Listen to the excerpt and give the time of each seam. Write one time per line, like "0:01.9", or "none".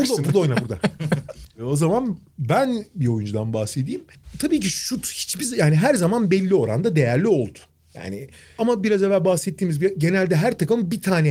none